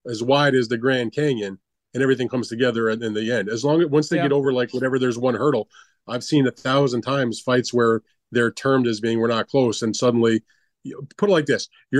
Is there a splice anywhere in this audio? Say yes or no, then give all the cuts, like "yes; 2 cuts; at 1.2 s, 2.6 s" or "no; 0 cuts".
no; 0 cuts